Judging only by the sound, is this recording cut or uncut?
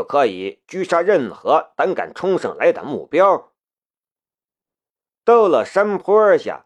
uncut